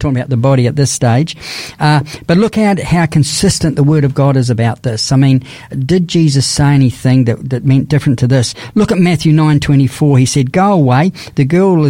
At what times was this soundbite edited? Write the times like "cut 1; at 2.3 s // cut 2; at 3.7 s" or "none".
none